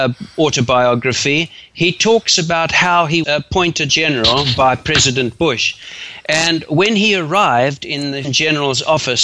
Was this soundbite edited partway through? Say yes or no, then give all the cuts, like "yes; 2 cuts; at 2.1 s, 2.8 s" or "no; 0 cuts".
yes; 3 cuts; at 3.2 s, 3.9 s, 8.2 s